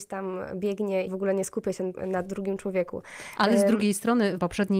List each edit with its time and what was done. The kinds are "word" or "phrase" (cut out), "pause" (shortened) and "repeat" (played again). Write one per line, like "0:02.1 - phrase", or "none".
0:01.1 - word